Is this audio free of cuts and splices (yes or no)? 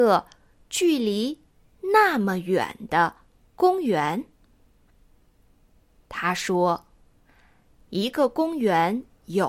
yes